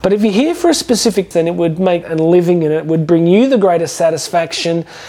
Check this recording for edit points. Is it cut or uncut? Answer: cut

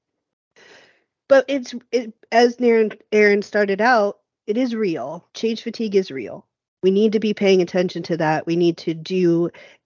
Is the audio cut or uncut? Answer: cut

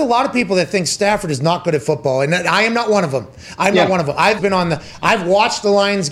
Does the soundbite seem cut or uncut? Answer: cut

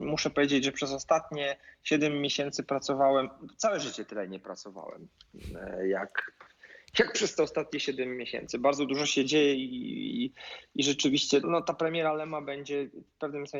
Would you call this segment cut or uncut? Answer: cut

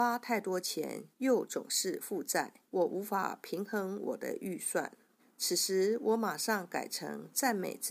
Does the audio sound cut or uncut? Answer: cut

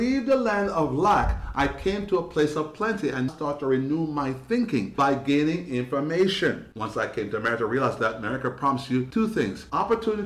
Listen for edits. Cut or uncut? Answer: cut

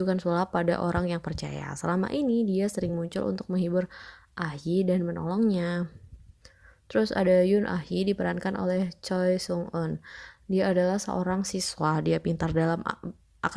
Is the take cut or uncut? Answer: uncut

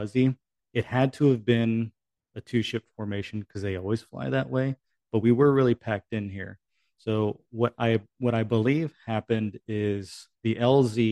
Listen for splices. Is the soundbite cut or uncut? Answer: uncut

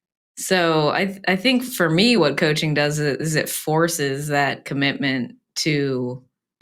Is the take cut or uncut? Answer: uncut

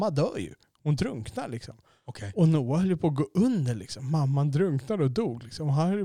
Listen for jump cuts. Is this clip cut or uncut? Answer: uncut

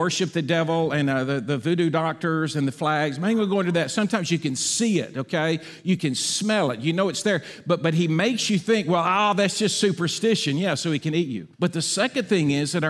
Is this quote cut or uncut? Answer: cut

